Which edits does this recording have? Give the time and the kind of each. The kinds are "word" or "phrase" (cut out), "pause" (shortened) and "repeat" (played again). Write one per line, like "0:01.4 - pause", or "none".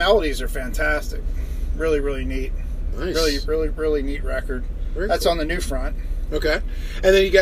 none